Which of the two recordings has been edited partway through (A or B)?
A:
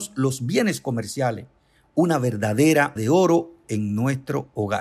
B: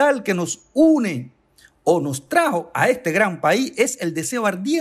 A